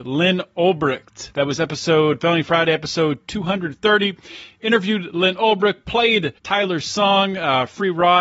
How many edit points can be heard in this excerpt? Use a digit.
1